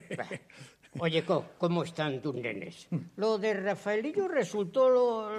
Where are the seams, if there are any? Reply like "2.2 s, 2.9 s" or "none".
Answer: none